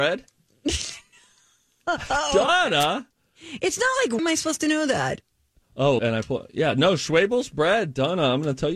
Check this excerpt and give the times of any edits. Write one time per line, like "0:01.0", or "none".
0:04.2
0:06.0